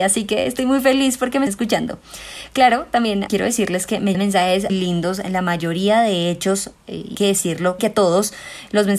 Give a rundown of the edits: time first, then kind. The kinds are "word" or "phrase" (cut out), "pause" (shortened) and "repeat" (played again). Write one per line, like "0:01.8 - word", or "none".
0:01.5 - word
0:03.3 - word
0:04.1 - word
0:04.7 - word
0:07.1 - word
0:07.8 - word

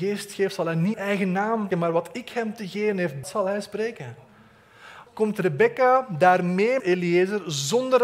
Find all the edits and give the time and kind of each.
0:00.9 - word
0:01.7 - word
0:03.2 - word
0:05.1 - word
0:06.8 - word

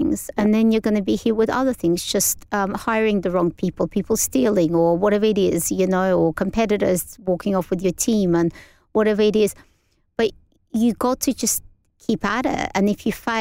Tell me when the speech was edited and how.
none

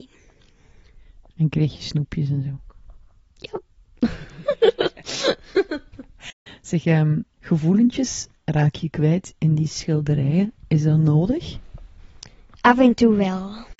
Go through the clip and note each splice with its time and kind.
none

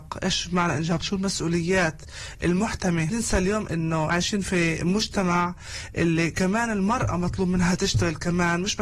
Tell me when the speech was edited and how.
0:01.0 - word
0:03.1 - phrase
0:03.7 - word
0:04.1 - word

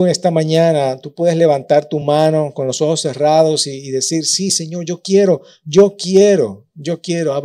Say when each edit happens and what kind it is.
none

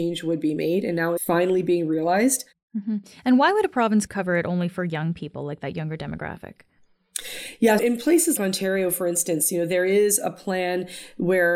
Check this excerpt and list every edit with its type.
0:01.2 - word
0:04.1 - word
0:07.8 - word
0:08.4 - word

